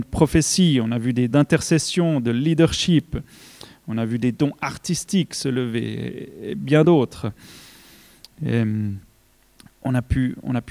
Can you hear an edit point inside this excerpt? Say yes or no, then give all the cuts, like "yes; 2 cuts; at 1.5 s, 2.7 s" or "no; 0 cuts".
yes; 1 cut; at 1.3 s